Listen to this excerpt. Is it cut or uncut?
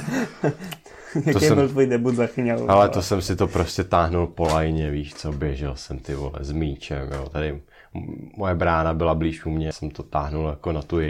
cut